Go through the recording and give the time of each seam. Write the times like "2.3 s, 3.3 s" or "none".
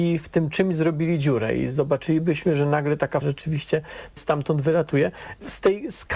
3.2 s